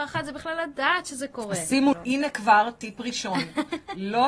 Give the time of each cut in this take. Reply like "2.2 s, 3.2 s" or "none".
1.9 s